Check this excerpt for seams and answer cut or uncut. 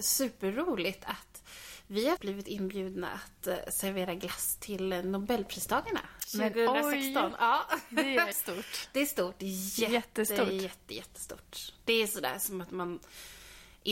cut